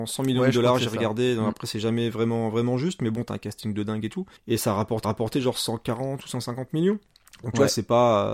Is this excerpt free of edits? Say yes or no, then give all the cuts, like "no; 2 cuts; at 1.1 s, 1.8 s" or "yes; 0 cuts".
no; 2 cuts; at 4.4 s, 5.0 s